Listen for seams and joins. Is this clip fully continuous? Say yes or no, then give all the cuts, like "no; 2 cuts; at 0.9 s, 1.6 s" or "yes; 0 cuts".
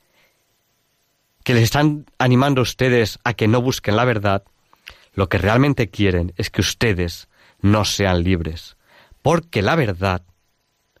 yes; 0 cuts